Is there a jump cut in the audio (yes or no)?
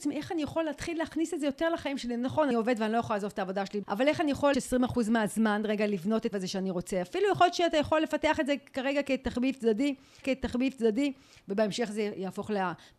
yes